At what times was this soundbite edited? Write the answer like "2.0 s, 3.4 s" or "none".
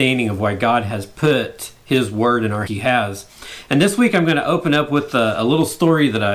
2.7 s